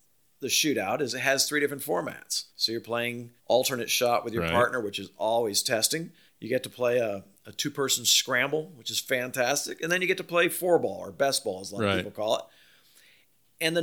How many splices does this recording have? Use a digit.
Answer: 3